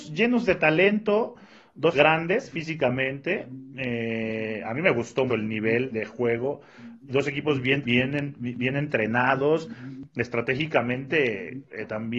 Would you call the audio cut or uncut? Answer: cut